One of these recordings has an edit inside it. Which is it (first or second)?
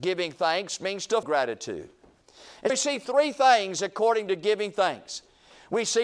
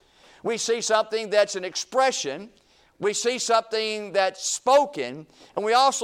first